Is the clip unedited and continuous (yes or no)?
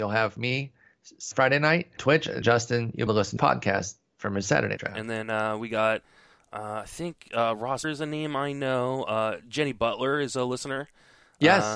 no